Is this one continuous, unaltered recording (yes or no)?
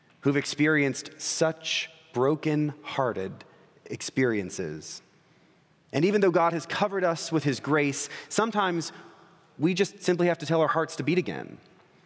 yes